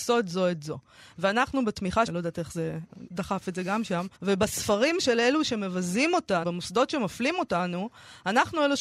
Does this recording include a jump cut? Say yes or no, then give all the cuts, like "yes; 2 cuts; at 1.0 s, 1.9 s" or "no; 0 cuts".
yes; 4 cuts; at 2.1 s, 3.1 s, 4.1 s, 6.4 s